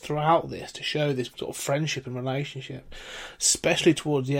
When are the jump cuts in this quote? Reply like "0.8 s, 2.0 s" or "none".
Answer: 1.3 s